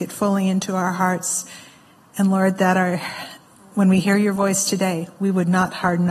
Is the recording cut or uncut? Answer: uncut